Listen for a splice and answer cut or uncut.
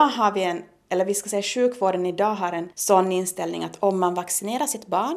cut